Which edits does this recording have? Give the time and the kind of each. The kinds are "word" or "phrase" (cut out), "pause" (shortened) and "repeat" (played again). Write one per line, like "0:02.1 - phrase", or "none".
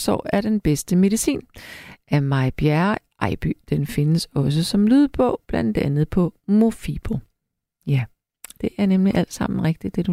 none

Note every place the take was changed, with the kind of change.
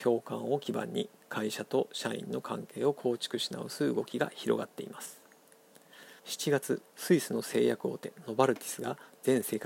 0:06.2 - pause
0:06.9 - pause

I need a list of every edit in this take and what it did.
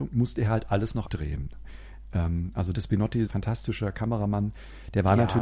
0:01.1 - word
0:02.7 - word
0:03.3 - word

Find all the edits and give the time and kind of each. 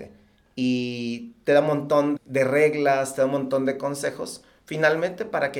0:02.2 - word

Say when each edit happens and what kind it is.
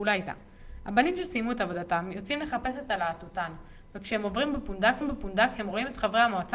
0:05.0 - repeat

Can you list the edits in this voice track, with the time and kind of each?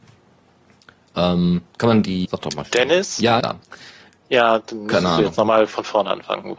0:02.2 - word
0:03.4 - phrase

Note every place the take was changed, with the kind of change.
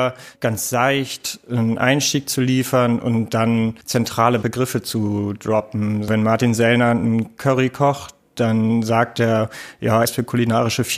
0:10.0 - word

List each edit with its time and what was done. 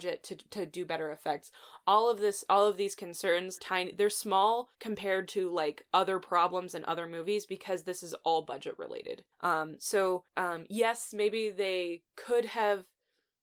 0:03.6 - phrase
0:04.7 - pause
0:09.3 - pause
0:10.3 - pause

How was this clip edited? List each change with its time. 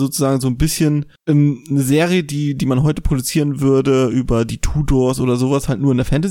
0:01.2 - pause

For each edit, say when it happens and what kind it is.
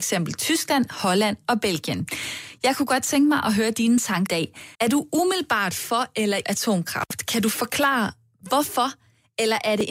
0:04.3 - word
0:04.7 - pause
0:06.4 - word

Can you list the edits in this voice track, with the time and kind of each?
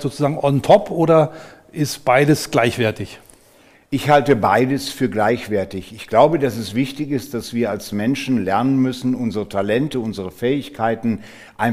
none

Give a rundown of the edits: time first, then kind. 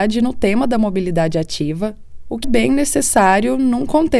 0:02.4 - word

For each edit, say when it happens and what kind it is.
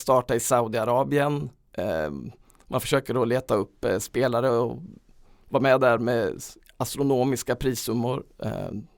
none

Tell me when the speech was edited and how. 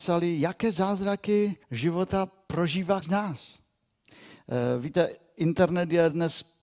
0:01.6 - pause
0:03.0 - word

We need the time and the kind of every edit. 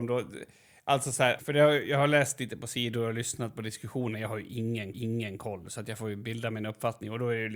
0:01.4 - word
0:04.9 - repeat

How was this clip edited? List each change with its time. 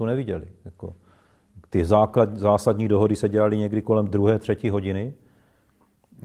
none

